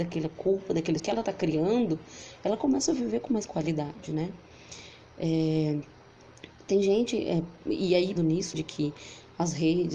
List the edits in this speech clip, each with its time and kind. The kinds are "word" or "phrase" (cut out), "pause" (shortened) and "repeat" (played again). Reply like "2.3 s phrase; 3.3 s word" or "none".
1.0 s word; 3.3 s word; 8.2 s word; 8.5 s word